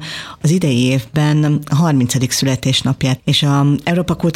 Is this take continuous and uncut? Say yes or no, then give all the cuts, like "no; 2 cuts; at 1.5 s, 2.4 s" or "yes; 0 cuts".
no; 1 cut; at 3.2 s